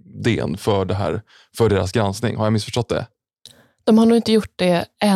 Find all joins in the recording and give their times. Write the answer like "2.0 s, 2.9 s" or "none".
none